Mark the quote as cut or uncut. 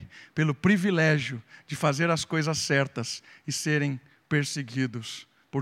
uncut